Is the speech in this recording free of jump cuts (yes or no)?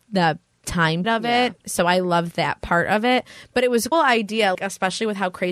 no